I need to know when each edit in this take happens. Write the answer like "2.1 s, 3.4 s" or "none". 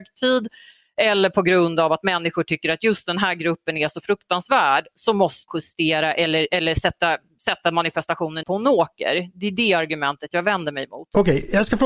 5.5 s, 8.4 s